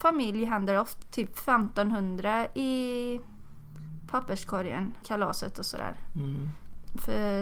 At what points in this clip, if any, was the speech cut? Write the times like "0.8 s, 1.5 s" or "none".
1.0 s, 5.0 s